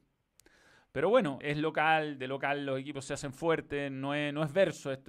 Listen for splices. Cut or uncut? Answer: cut